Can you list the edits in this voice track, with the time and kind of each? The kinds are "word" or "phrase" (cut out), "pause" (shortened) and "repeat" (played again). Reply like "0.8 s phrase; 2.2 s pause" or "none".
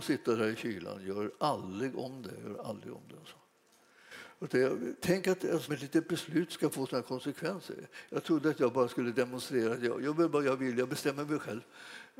5.7 s word; 10.0 s word